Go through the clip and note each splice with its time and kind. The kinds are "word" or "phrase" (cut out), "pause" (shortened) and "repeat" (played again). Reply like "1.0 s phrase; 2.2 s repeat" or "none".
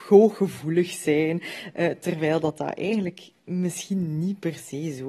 none